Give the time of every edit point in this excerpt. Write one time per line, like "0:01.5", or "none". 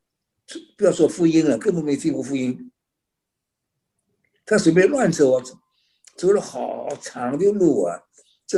none